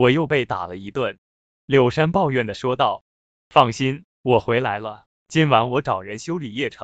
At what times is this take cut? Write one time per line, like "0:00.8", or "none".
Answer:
none